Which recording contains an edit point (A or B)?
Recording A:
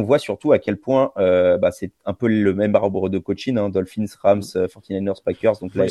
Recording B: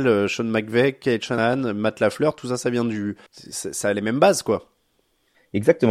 B